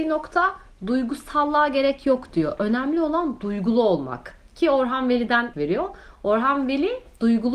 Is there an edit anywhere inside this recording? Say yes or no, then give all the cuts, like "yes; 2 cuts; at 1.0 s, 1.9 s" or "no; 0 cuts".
yes; 1 cut; at 5.5 s